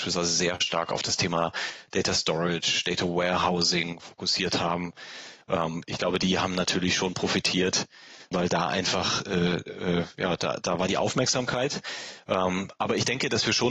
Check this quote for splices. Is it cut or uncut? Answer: cut